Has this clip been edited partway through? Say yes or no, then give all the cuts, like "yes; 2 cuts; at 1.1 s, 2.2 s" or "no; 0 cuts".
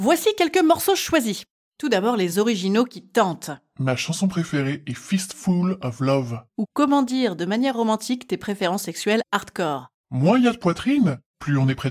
no; 0 cuts